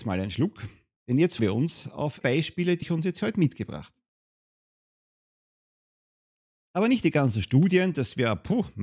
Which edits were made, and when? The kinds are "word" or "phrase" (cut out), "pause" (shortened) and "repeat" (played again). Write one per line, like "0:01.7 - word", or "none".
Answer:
0:01.4 - word
0:02.2 - word
0:02.8 - word